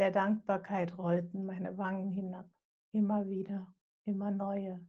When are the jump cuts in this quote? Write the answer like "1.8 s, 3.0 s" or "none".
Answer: none